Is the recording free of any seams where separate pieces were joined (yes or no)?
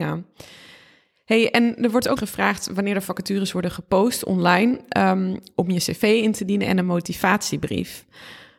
no